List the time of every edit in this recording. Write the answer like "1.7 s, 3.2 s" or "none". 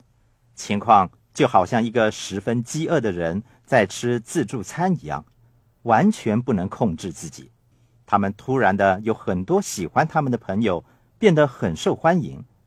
7.7 s